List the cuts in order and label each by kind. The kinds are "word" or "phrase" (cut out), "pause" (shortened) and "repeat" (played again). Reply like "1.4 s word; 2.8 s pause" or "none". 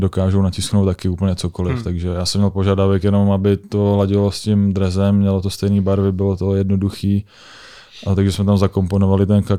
none